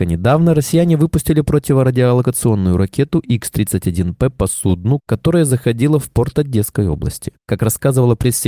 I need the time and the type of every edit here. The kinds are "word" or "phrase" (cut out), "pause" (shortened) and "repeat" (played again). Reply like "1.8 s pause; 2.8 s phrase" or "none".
none